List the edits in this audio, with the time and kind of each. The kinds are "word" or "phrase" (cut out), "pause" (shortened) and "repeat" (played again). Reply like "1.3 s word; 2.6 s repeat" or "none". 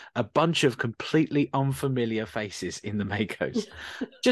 none